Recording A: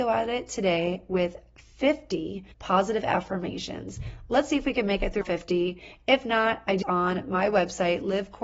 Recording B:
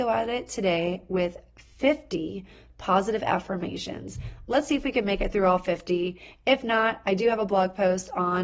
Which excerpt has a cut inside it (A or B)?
A